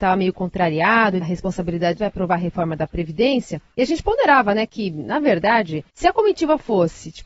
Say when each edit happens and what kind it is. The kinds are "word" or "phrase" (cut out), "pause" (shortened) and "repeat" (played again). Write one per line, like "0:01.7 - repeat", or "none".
0:01.2 - phrase
0:02.0 - phrase
0:03.7 - pause
0:05.9 - pause